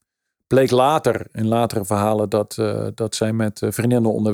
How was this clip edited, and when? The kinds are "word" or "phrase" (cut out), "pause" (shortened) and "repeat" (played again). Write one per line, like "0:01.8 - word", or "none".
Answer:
none